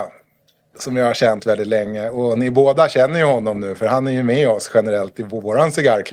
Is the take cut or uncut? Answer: cut